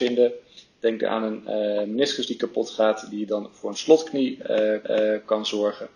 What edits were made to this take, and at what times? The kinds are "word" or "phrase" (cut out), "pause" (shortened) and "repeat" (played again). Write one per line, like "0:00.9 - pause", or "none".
0:04.8 - repeat